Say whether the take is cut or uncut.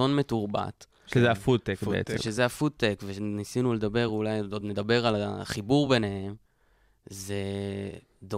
uncut